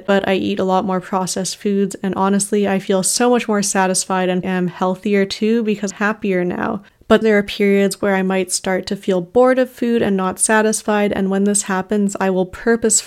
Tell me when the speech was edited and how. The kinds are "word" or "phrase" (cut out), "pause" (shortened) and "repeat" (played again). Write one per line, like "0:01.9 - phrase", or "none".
0:04.4 - word
0:05.9 - word
0:07.2 - word